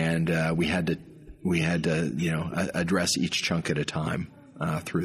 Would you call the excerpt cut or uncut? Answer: uncut